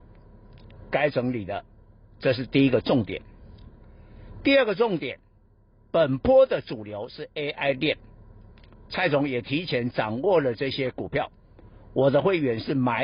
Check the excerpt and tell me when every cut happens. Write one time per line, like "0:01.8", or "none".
none